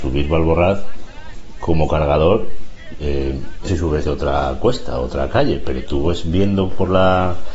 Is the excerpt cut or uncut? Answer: cut